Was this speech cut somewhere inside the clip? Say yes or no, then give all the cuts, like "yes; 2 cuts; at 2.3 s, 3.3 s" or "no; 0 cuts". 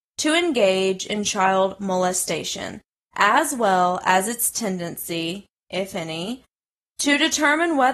no; 0 cuts